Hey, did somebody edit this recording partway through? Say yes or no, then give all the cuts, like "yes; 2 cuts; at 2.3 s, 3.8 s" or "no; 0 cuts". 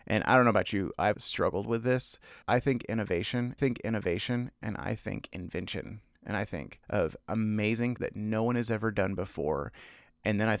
yes; 5 cuts; at 1.1 s, 2.4 s, 3.6 s, 6.8 s, 8.0 s